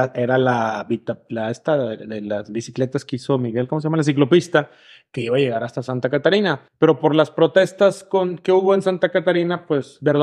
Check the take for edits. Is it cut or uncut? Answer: cut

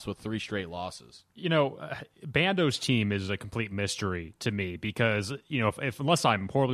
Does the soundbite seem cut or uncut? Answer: cut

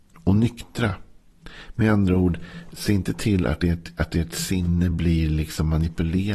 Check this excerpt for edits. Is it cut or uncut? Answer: uncut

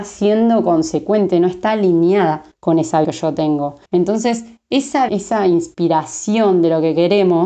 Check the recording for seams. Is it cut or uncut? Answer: cut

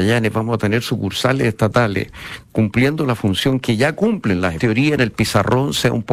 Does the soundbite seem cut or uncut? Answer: cut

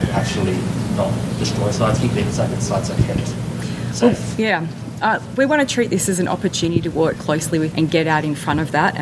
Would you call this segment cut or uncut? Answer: cut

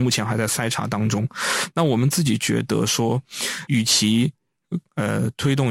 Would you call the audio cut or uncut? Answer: cut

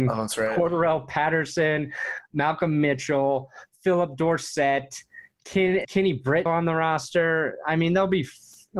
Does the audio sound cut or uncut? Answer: cut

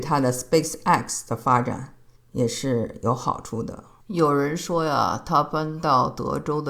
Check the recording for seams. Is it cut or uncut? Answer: cut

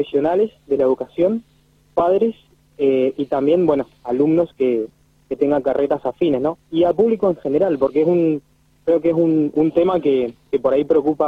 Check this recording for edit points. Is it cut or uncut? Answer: uncut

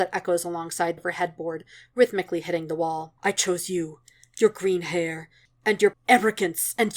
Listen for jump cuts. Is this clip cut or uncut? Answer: cut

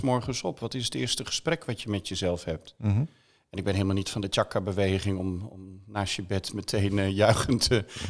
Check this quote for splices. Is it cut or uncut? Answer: uncut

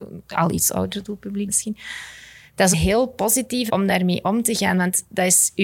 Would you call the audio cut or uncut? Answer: cut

